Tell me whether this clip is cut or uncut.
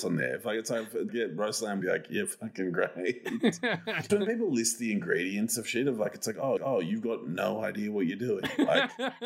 cut